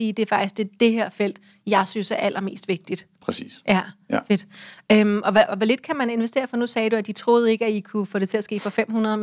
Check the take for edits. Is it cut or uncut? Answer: uncut